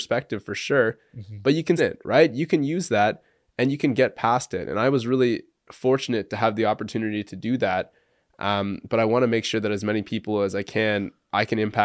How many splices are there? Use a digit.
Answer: 1